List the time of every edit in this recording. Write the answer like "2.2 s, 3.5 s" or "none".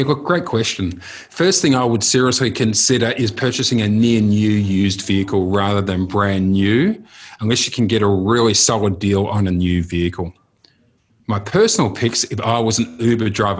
none